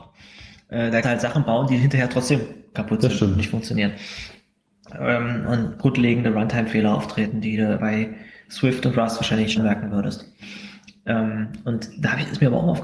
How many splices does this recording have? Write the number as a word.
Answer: four